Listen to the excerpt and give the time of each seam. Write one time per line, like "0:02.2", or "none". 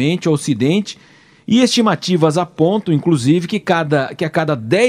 none